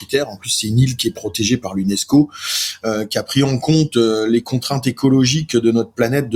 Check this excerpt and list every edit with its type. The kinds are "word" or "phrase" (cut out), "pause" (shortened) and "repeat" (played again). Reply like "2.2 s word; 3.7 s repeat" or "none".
none